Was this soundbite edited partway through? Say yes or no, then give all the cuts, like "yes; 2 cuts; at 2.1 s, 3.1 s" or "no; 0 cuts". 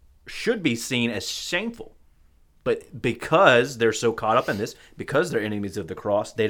no; 0 cuts